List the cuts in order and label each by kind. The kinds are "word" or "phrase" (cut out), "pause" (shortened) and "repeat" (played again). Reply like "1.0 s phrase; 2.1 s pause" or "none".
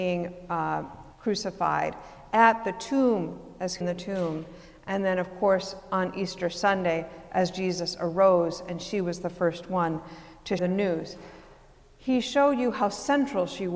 1.1 s pause; 3.8 s phrase; 10.6 s word